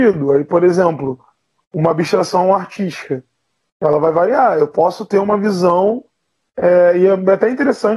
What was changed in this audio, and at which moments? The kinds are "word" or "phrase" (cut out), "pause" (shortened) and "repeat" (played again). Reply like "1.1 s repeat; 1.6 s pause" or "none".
none

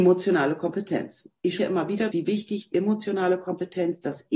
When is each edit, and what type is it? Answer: 1.6 s word; 2.1 s word; 2.7 s word

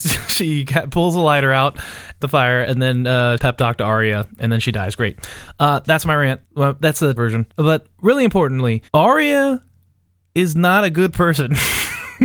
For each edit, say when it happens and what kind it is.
2.2 s phrase; 3.4 s phrase; 6.5 s pause; 7.2 s word; 7.5 s pause; 8.9 s pause

